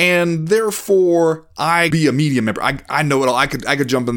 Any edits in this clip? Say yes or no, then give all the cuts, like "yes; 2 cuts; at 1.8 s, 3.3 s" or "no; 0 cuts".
yes; 1 cut; at 1.9 s